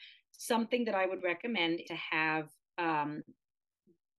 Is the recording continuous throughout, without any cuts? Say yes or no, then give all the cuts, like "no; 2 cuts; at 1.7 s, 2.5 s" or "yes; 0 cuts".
no; 1 cut; at 1.8 s